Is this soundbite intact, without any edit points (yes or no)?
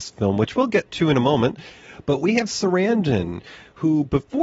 no